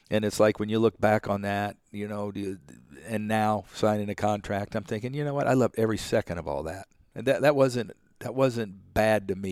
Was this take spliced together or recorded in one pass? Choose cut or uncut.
uncut